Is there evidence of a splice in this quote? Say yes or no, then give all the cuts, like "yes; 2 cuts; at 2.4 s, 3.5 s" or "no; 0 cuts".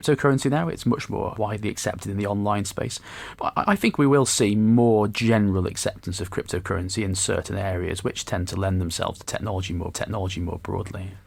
yes; 2 cuts; at 1.4 s, 9.9 s